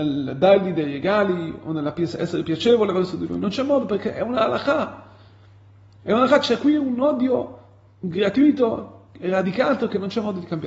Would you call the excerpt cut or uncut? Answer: uncut